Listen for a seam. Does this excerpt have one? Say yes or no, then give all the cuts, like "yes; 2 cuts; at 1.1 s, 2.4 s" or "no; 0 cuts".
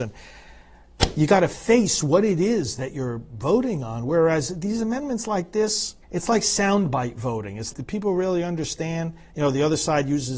yes; 2 cuts; at 6.0 s, 7.7 s